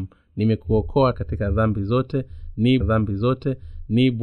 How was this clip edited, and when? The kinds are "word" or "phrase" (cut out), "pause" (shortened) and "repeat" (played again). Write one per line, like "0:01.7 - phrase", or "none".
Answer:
0:01.1 - word
0:02.8 - repeat